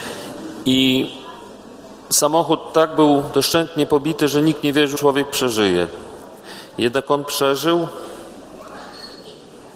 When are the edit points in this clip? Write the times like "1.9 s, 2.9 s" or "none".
2.0 s, 4.9 s